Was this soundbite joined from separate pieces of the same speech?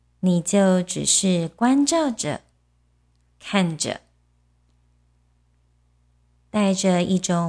no; 0 cuts

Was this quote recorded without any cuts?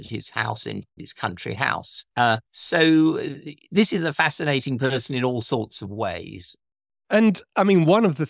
no; 2 cuts; at 1.0 s, 2.5 s

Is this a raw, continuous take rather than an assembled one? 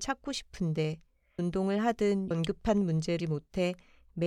no; 3 cuts; at 1.4 s, 2.3 s, 3.2 s

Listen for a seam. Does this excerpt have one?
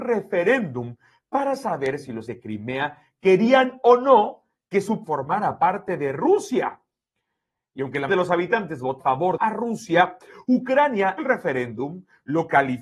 yes; 6 cuts; at 2.3 s, 5.0 s, 8.1 s, 9.0 s, 9.4 s, 11.2 s

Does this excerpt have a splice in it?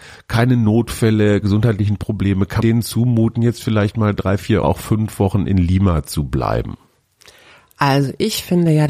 yes; 3 cuts; at 1.4 s, 2.6 s, 4.6 s

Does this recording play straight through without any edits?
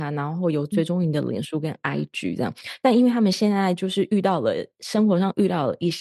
yes; 0 cuts

